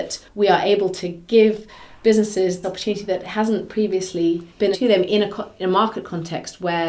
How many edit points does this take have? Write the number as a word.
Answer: two